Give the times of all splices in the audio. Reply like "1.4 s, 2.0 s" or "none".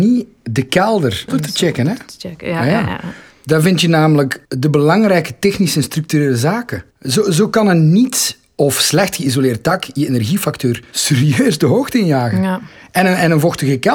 1.3 s, 4.5 s, 6.9 s